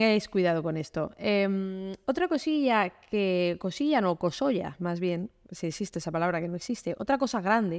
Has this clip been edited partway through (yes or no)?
no